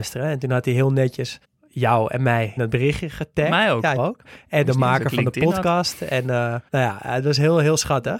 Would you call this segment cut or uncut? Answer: cut